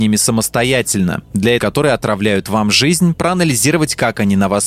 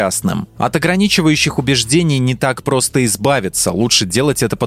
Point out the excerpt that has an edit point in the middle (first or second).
first